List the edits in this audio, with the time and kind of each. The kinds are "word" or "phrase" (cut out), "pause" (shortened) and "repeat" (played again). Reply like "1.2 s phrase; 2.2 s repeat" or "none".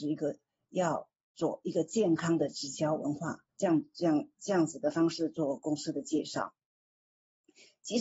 3.5 s pause